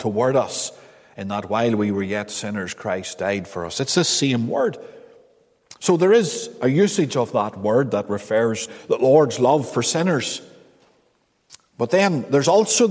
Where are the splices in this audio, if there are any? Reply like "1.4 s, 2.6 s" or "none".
8.7 s